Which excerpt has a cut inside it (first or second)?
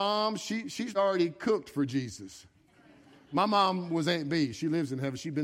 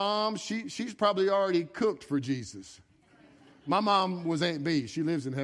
first